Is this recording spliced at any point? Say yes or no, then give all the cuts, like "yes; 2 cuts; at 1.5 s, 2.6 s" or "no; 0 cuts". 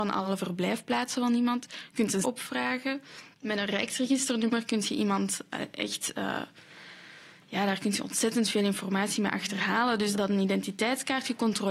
yes; 2 cuts; at 2.2 s, 10.1 s